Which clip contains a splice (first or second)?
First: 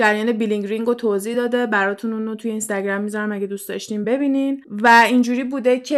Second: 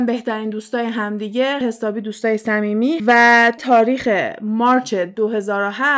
second